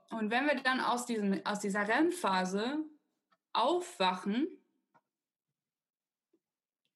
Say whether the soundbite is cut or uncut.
uncut